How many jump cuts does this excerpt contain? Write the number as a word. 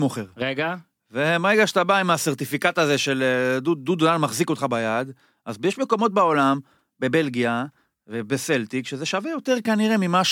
zero